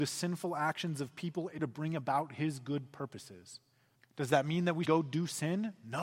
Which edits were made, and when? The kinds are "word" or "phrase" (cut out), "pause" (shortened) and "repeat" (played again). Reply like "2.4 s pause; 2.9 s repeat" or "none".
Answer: 1.6 s word; 4.0 s pause; 4.9 s word